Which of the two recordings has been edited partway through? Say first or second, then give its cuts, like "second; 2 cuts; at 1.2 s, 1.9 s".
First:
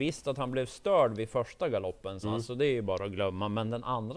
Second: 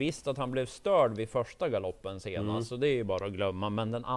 first; 1 cut; at 2.2 s